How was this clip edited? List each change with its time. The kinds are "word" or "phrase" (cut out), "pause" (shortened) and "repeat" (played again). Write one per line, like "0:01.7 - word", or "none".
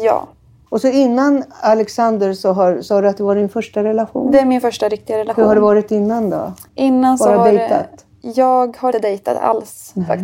0:06.7 - pause
0:08.9 - word